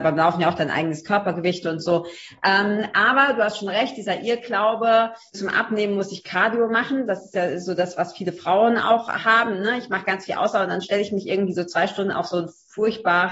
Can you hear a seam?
yes; 1 cut; at 5.3 s

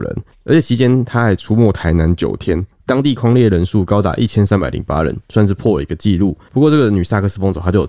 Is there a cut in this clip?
no; 0 cuts

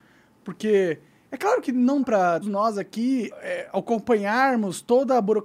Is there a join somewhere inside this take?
yes; 3 cuts; at 2.0 s, 2.4 s, 3.3 s

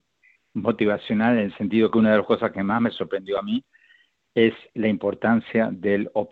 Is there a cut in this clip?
no; 0 cuts

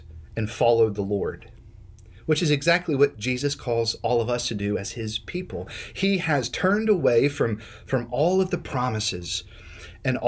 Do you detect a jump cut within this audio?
no; 0 cuts

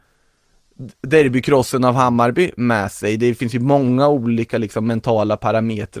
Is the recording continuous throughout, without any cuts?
yes; 0 cuts

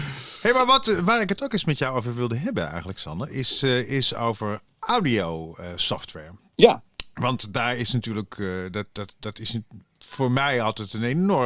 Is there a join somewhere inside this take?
yes; 2 cuts; at 6.5 s, 8.9 s

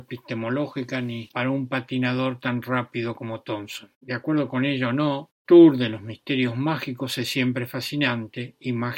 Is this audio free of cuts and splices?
no; 2 cuts; at 1.3 s, 3.9 s

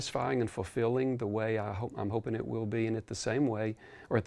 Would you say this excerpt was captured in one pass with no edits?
yes; 0 cuts

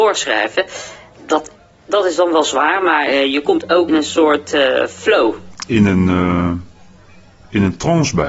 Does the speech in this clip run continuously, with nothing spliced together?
no; 1 cut; at 3.9 s

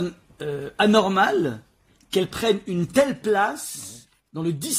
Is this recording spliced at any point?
no; 0 cuts

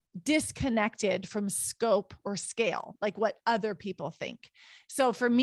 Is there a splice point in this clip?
no; 0 cuts

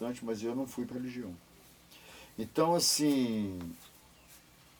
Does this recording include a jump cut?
yes; 1 cut; at 0.9 s

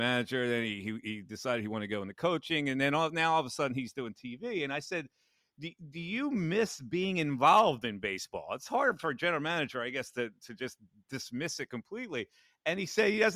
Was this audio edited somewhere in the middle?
no; 0 cuts

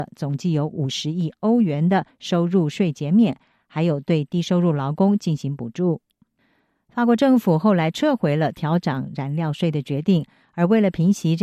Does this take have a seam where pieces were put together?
no; 0 cuts

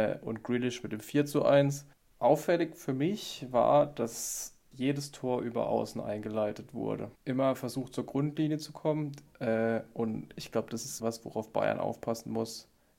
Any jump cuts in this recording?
yes; 4 cuts; at 1.9 s, 4.7 s, 7.2 s, 11.0 s

